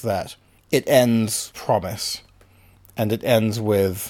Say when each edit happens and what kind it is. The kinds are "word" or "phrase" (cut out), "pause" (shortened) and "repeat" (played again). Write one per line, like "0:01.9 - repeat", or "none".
0:01.5 - word

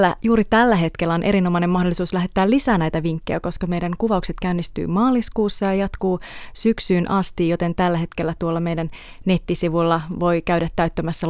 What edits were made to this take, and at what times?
none

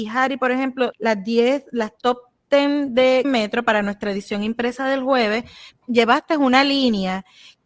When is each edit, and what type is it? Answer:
0:00.9 - word
0:03.2 - phrase
0:05.7 - word

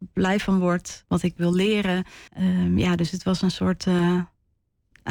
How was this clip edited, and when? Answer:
0:01.0 - word
0:01.4 - phrase
0:02.3 - pause

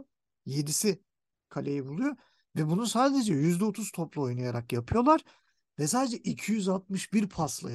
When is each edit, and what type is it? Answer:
none

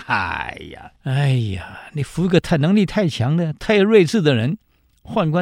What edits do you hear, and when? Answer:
0:01.0 - pause

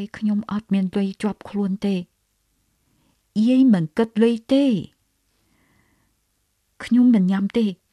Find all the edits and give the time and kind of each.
none

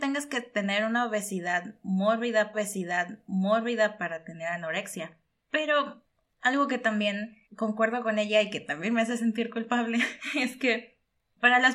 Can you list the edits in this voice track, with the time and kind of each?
0:02.5 - repeat
0:07.4 - pause

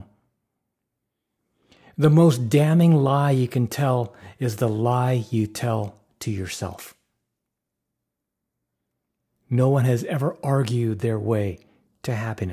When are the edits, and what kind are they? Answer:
none

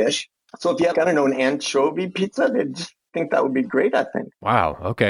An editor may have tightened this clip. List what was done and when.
0:00.9 - word

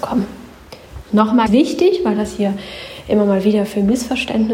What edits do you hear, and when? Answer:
0:01.5 - word

